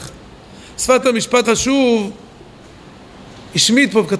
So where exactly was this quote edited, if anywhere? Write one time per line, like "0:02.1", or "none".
0:01.0
0:01.4